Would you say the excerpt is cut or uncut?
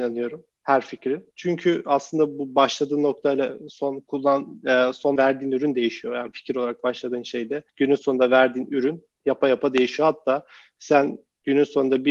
cut